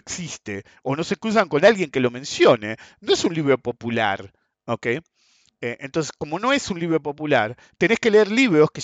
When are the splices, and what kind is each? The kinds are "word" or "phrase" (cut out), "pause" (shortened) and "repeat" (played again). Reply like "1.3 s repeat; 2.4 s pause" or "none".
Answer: none

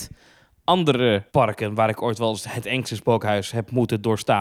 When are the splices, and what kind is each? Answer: 1.3 s pause

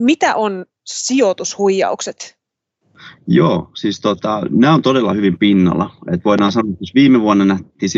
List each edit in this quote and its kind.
5.4 s word

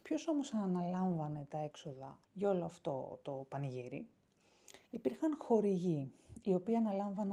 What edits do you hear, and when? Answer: 2.2 s pause; 4.8 s pause

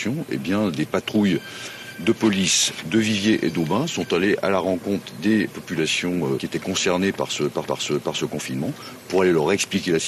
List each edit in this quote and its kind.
2.8 s phrase; 5.5 s word; 6.4 s word; 7.6 s repeat

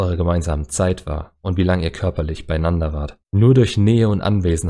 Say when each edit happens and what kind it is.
3.2 s pause

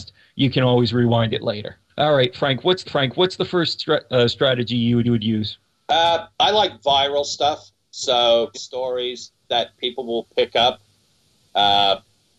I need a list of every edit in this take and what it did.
1.9 s pause; 2.8 s repeat; 5.0 s repeat; 6.3 s pause; 8.5 s phrase; 9.4 s pause

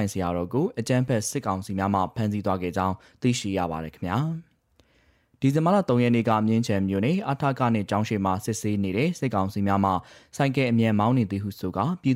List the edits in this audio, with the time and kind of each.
none

